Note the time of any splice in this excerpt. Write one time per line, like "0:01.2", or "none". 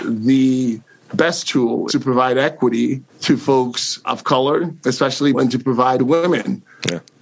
0:01.9
0:03.1
0:04.0
0:05.3
0:06.0